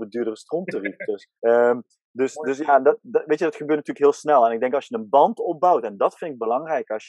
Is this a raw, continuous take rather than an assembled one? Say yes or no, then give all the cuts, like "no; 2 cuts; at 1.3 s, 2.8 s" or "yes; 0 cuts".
no; 1 cut; at 1.4 s